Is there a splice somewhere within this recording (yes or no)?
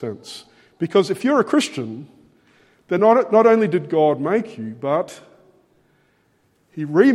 no